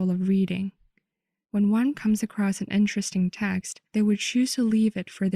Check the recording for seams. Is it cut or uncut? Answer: cut